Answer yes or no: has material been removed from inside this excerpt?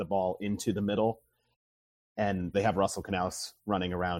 yes